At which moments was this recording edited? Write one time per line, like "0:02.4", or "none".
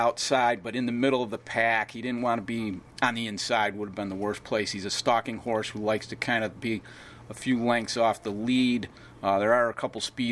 0:02.9